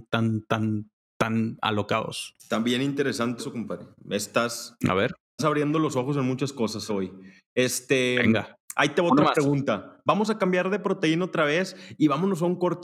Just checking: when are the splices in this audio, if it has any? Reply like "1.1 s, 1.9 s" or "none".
2.4 s, 3.4 s, 5.4 s, 6.9 s